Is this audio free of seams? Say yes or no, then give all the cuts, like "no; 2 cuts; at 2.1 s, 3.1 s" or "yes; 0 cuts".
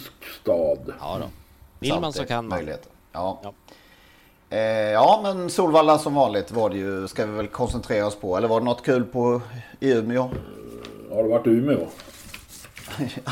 no; 1 cut; at 1.8 s